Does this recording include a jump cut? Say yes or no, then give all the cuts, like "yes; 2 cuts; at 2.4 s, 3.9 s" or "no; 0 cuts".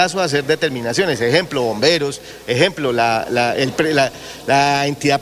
no; 0 cuts